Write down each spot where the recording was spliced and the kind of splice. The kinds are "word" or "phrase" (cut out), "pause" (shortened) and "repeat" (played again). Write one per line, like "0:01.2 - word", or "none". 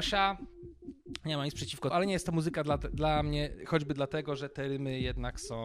0:01.9 - word